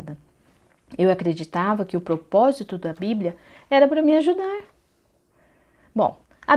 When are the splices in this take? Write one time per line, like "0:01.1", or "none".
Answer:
none

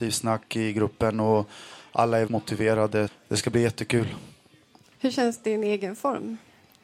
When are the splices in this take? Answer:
0:02.3
0:03.1

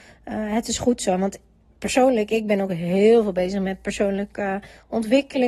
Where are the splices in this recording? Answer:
none

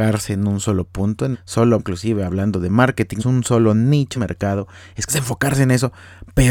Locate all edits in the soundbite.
0:01.3
0:01.8
0:03.2
0:04.1
0:05.1

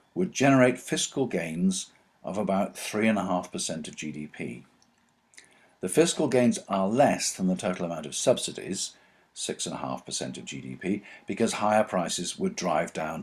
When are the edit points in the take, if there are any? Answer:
none

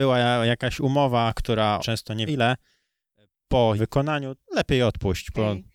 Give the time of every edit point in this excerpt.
0:01.8
0:02.3
0:03.8
0:04.4

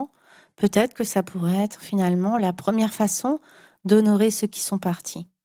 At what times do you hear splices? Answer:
none

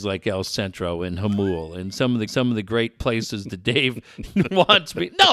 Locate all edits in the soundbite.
0:02.3

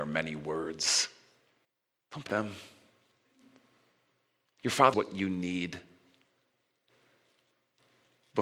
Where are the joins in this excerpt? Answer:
0:01.6
0:02.3
0:04.9

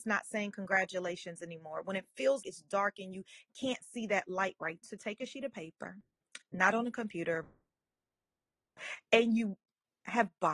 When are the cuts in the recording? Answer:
0:02.4
0:04.8

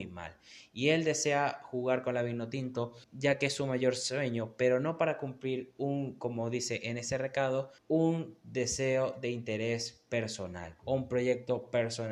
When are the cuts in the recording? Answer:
0:03.0
0:07.8
0:10.8

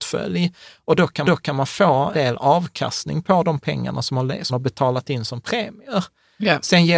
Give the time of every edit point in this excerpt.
0:01.2
0:02.1
0:04.5

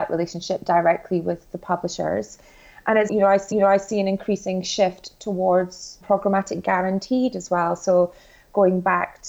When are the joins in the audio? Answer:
0:03.1
0:03.5
0:06.0

